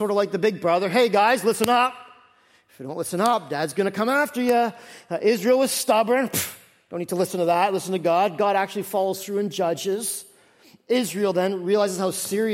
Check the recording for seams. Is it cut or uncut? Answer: uncut